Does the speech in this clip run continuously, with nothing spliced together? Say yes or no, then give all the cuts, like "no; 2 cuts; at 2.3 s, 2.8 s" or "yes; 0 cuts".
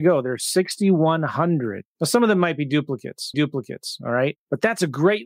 no; 1 cut; at 3.3 s